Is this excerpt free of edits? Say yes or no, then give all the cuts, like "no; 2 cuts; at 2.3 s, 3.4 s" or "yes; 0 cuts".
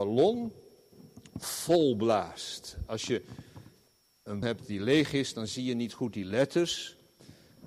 no; 1 cut; at 4.4 s